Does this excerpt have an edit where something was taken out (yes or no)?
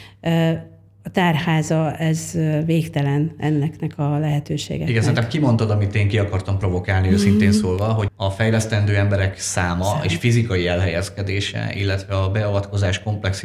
yes